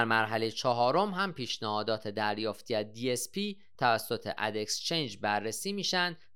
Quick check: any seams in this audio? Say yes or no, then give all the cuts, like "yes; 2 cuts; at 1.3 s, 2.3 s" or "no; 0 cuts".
no; 0 cuts